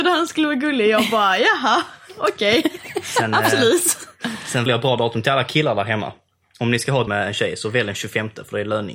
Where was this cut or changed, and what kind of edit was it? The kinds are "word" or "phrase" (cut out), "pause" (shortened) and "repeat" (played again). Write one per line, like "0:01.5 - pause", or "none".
0:04.7 - word
0:07.1 - word